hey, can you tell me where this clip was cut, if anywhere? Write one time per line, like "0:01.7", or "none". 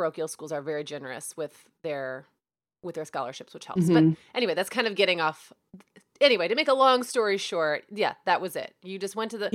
none